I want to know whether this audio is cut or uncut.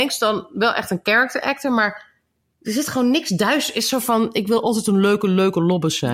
uncut